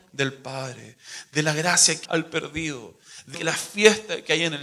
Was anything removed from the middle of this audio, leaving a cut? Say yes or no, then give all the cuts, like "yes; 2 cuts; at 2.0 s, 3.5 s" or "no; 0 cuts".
yes; 2 cuts; at 2.0 s, 3.3 s